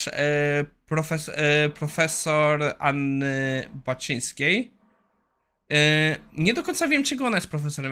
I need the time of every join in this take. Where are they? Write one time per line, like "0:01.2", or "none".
none